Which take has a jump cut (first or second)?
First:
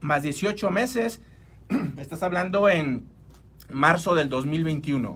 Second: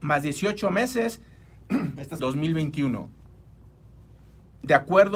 second